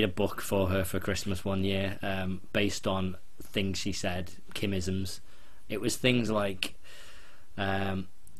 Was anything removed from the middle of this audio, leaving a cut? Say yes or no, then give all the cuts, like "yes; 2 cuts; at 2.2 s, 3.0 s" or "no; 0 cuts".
no; 0 cuts